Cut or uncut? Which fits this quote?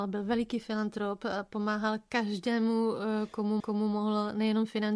cut